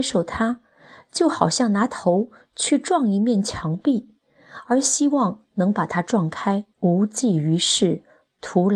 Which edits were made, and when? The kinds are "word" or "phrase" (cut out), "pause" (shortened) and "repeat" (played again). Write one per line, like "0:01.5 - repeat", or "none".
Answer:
0:06.7 - pause